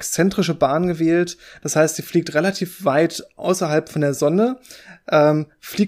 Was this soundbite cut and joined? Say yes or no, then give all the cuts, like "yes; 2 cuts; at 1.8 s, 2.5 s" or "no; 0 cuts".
no; 0 cuts